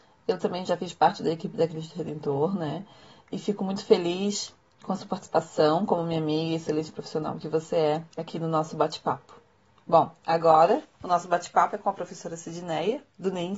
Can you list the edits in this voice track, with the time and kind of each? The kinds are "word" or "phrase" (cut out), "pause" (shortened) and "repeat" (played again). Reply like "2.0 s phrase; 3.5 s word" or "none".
8.1 s pause; 10.9 s pause